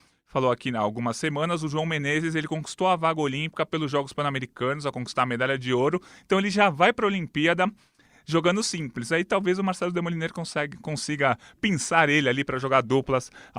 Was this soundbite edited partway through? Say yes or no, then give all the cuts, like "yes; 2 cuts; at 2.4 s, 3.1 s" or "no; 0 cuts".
no; 0 cuts